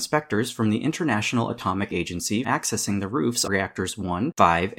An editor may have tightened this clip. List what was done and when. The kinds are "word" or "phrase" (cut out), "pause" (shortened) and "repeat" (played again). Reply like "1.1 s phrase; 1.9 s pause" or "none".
1.9 s word; 2.4 s word; 3.5 s word